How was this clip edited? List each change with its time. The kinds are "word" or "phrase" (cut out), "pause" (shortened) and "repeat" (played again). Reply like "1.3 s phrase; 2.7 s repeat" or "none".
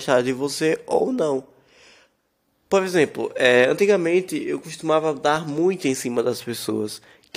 none